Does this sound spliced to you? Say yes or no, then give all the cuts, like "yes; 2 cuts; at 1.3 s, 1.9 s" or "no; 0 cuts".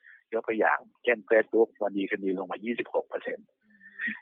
yes; 1 cut; at 1.0 s